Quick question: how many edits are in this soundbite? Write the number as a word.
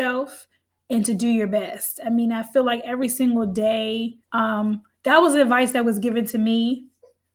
one